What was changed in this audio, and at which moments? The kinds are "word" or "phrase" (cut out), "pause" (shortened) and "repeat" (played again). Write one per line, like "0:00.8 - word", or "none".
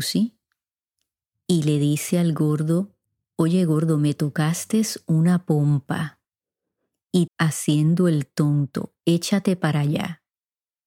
0:03.0 - pause
0:07.3 - phrase